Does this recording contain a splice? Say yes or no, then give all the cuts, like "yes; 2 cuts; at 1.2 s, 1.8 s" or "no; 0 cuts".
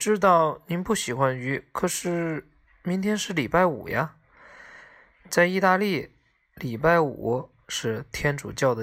no; 0 cuts